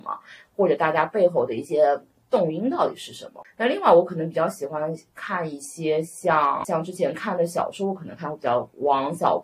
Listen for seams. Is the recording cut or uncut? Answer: uncut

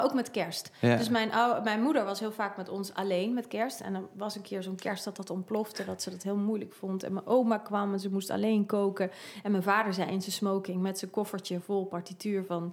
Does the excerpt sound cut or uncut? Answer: uncut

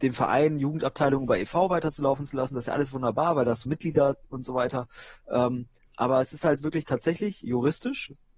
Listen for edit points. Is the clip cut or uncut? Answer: uncut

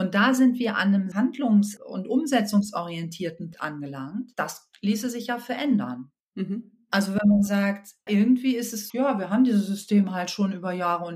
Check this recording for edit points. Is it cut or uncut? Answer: cut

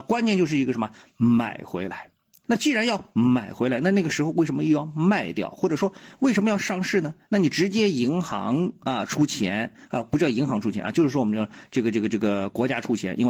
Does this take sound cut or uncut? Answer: cut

